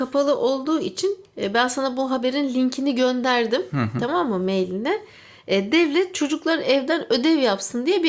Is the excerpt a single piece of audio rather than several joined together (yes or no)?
yes